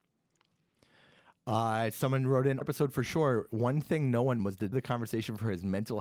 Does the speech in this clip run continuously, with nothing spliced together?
no; 3 cuts; at 2.6 s, 4.4 s, 4.7 s

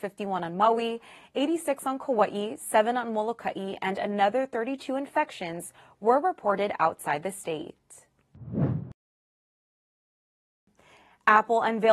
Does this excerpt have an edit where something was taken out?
no; 0 cuts

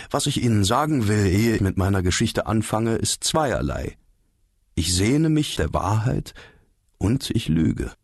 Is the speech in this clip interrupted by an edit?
yes; 2 cuts; at 1.6 s, 5.6 s

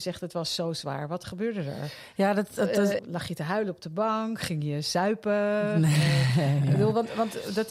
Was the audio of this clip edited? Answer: yes; 1 cut; at 3.0 s

